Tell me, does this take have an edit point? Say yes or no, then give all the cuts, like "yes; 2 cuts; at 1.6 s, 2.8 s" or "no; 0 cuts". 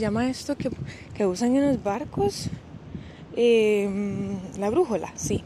no; 0 cuts